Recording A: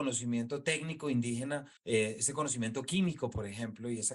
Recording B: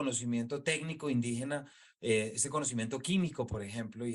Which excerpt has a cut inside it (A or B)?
A